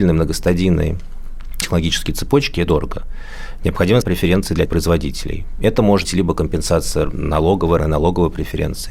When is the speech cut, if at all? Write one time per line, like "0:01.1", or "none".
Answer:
0:01.6
0:02.7
0:04.0
0:04.7
0:06.0
0:07.8